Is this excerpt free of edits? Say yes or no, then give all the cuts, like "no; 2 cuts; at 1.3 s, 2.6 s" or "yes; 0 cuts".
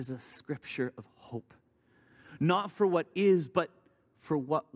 yes; 0 cuts